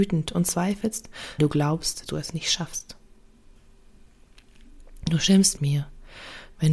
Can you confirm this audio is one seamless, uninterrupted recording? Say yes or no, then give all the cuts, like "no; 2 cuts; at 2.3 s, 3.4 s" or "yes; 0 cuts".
no; 3 cuts; at 1.4 s, 2.1 s, 5.6 s